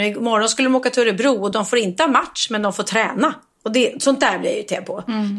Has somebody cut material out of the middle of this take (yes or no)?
no